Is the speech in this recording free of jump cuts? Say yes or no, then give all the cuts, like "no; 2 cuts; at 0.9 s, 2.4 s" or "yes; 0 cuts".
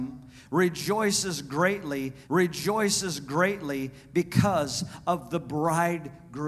no; 1 cut; at 2.2 s